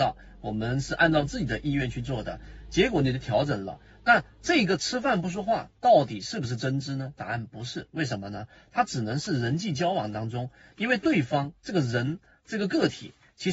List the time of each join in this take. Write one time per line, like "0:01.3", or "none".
none